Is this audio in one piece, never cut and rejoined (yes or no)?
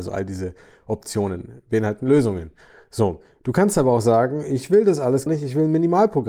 no